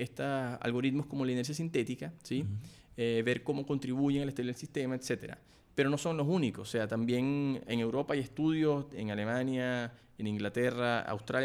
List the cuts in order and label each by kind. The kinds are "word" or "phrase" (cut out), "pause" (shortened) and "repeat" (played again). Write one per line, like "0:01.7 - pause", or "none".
none